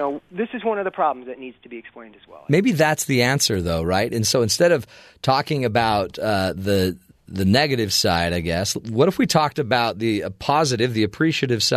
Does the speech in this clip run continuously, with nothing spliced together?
yes; 0 cuts

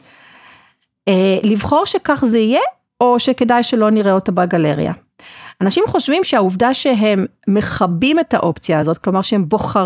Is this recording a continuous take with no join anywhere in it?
yes; 0 cuts

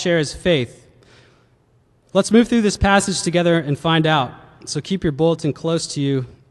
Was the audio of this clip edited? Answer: no; 0 cuts

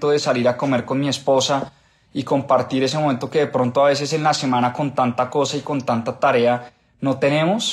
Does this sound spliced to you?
no; 0 cuts

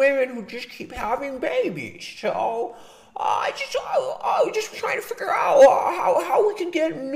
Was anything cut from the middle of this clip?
no; 0 cuts

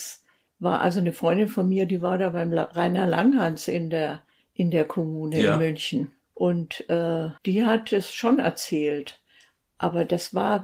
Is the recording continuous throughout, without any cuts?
no; 3 cuts; at 4.4 s, 6.2 s, 7.4 s

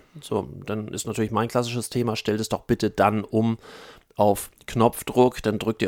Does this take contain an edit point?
no; 0 cuts

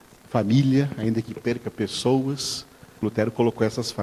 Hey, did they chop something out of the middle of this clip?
yes; 1 cut; at 3.0 s

